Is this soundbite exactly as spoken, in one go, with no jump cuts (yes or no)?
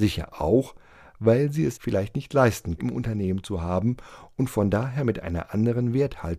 no